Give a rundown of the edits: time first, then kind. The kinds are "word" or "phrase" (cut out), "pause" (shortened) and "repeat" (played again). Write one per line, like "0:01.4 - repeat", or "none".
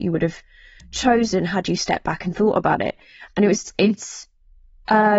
0:03.7 - word

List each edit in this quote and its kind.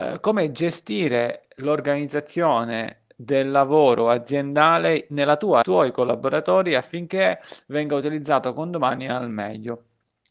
0:05.6 - phrase

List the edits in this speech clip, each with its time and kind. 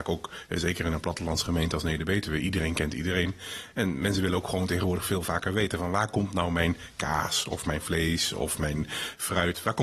none

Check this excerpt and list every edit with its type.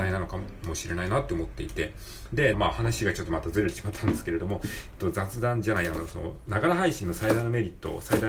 0:02.5 - phrase

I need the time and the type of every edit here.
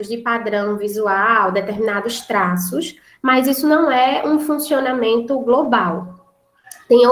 none

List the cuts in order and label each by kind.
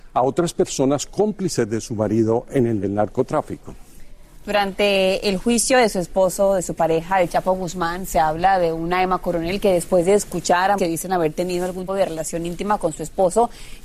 0:02.8 - word
0:10.8 - word
0:11.9 - word

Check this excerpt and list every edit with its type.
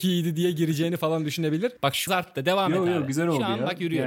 0:01.8 - pause
0:02.1 - phrase

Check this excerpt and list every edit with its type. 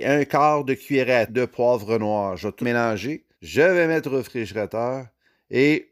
0:01.3 - word
0:02.6 - word
0:03.3 - pause

